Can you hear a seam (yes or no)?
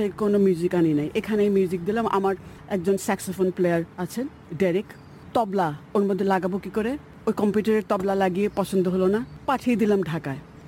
yes